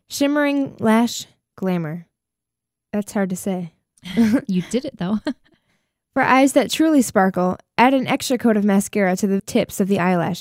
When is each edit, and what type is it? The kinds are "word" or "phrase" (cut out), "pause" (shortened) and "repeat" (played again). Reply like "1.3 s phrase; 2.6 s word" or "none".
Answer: 9.4 s word